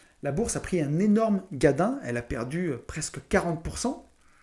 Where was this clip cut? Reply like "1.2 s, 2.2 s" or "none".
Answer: none